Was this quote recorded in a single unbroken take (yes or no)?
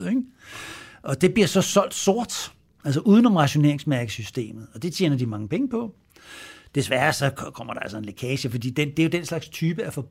yes